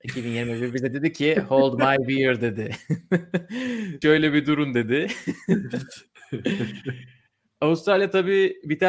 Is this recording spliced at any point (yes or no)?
yes